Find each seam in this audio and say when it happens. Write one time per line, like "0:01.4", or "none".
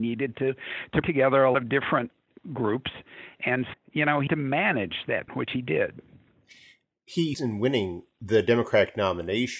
0:01.0
0:01.5
0:02.3
0:03.7
0:04.3
0:05.3
0:07.3